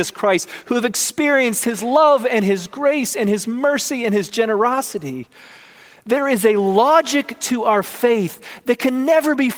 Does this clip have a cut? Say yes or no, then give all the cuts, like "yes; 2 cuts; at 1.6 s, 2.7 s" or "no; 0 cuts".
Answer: no; 0 cuts